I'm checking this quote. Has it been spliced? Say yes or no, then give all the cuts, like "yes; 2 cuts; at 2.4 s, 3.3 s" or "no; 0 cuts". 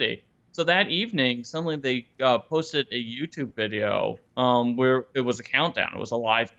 yes; 1 cut; at 4.2 s